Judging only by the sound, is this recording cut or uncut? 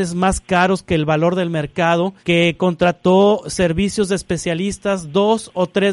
cut